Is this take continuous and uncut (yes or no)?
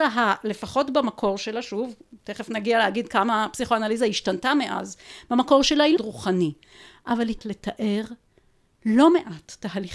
no